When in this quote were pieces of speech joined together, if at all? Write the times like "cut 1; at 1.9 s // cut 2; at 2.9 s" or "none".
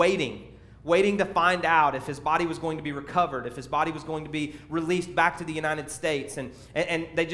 none